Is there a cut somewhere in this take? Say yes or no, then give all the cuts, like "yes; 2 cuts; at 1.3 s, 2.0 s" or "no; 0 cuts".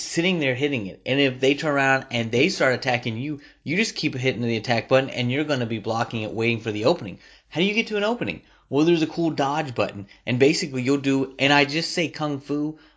no; 0 cuts